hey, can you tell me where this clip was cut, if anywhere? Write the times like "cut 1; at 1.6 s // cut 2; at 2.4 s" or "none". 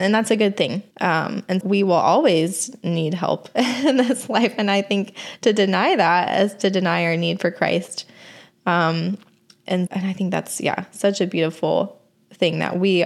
cut 1; at 0.9 s // cut 2; at 1.6 s // cut 3; at 9.9 s

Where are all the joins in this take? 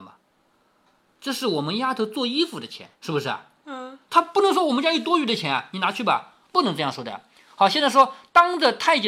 cut 1; at 2.9 s

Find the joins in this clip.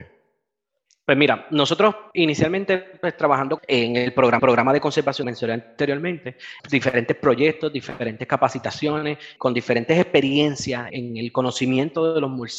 cut 1; at 2.1 s // cut 2; at 3.6 s // cut 3; at 4.4 s // cut 4; at 5.2 s // cut 5; at 6.6 s // cut 6; at 9.4 s // cut 7; at 10.9 s

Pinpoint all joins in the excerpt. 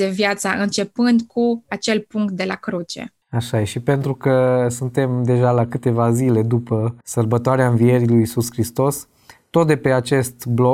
cut 1; at 3.2 s // cut 2; at 7.0 s

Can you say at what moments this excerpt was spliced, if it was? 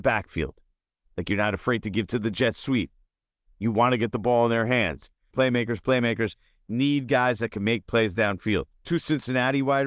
cut 1; at 5.3 s

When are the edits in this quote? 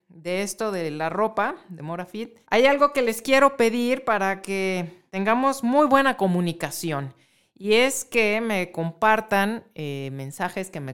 cut 1; at 2.4 s // cut 2; at 5.1 s

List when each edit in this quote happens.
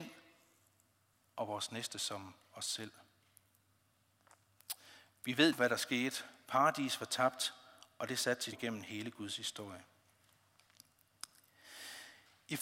cut 1; at 5.5 s // cut 2; at 8.5 s

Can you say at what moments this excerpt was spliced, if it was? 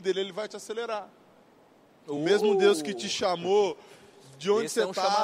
none

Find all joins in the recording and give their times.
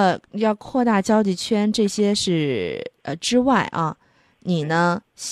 cut 1; at 3.0 s

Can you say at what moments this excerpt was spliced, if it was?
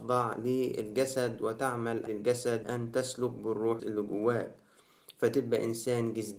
cut 1; at 2.1 s // cut 2; at 2.6 s // cut 3; at 3.8 s

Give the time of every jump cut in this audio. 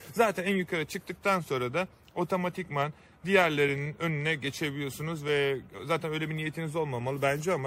none

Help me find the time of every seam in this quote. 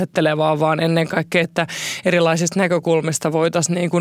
cut 1; at 1.4 s

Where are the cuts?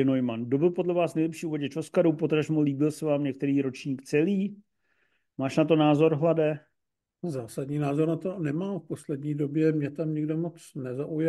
none

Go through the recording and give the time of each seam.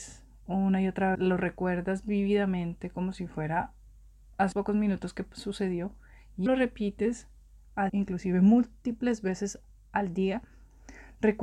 cut 1; at 1.1 s // cut 2; at 4.5 s // cut 3; at 6.5 s // cut 4; at 7.9 s

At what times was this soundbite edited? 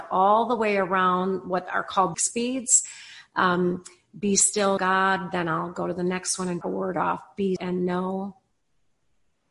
cut 1; at 2.1 s // cut 2; at 4.8 s // cut 3; at 6.6 s // cut 4; at 7.6 s

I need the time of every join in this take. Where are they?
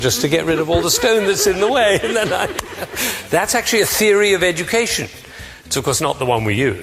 none

